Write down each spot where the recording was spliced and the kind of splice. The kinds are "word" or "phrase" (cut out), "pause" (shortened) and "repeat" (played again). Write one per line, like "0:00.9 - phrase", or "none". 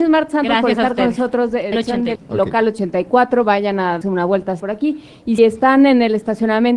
0:01.7 - word
0:02.2 - word
0:04.0 - word
0:04.6 - word
0:05.4 - word